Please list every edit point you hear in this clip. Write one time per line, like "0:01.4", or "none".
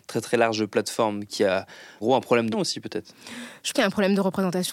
0:02.0
0:02.5
0:03.7